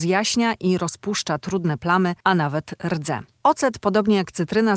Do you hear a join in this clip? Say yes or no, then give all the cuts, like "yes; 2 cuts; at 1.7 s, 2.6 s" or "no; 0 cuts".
yes; 1 cut; at 2.2 s